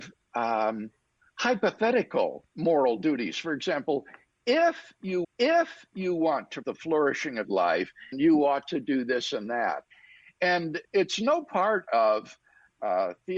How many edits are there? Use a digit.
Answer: 6